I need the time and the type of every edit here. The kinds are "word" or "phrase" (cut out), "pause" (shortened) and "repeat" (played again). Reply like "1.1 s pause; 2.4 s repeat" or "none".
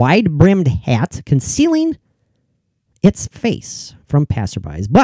none